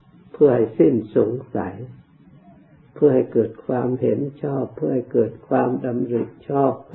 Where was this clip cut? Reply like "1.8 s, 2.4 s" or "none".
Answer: none